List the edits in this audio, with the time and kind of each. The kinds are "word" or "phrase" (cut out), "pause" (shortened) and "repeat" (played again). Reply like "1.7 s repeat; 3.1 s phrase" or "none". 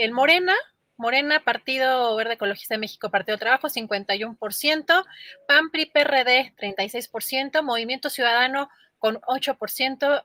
9.2 s word